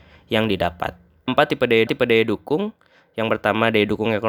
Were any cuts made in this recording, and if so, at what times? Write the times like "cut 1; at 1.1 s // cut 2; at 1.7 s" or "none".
cut 1; at 1.3 s // cut 2; at 1.9 s